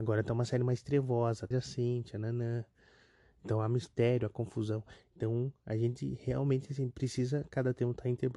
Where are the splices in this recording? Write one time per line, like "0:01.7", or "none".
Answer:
0:01.5